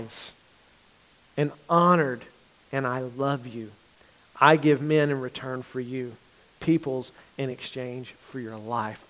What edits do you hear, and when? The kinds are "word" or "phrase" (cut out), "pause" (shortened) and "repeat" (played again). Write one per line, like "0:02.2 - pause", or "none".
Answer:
none